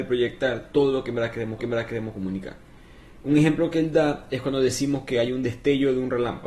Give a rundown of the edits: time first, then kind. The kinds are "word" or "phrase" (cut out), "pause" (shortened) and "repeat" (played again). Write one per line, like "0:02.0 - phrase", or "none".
0:01.6 - repeat